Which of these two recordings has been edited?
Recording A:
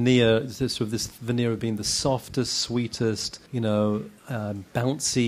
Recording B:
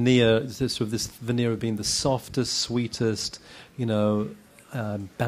A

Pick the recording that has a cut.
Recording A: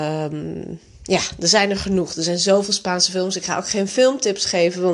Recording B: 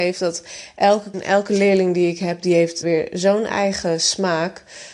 B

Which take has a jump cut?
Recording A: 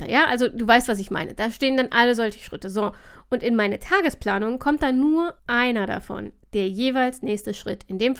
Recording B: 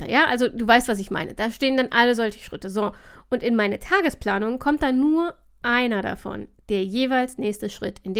A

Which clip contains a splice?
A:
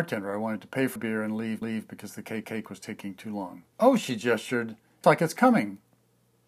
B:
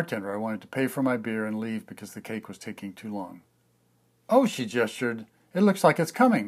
A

